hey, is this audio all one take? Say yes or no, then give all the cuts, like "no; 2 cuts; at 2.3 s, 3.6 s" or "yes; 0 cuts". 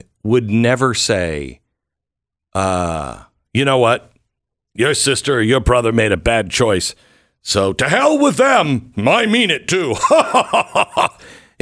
yes; 0 cuts